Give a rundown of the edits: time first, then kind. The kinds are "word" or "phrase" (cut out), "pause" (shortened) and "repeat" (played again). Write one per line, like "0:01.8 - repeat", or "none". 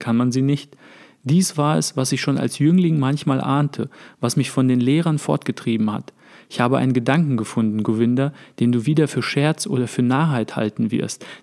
none